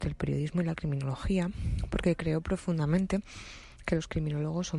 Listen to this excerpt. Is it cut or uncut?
uncut